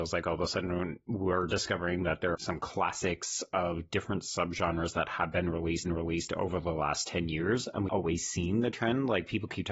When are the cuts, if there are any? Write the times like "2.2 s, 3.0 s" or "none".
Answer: 2.3 s, 5.8 s, 7.9 s